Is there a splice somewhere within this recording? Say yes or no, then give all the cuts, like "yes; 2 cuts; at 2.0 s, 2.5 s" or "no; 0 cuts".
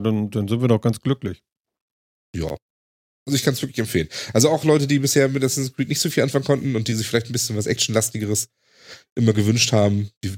no; 0 cuts